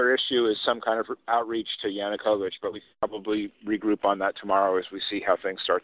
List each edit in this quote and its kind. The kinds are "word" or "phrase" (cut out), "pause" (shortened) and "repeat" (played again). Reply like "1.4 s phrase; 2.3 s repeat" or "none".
none

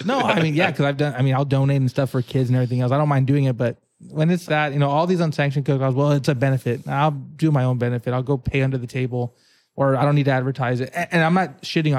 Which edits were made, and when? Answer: 4.5 s word

